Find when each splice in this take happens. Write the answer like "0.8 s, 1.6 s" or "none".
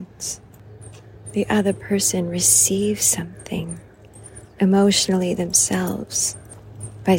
4.5 s